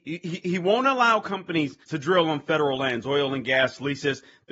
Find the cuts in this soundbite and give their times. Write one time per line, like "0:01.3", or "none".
0:01.8